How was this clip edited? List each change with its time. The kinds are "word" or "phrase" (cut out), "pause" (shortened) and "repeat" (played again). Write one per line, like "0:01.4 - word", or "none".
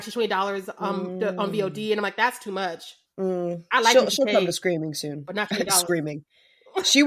0:03.1 - pause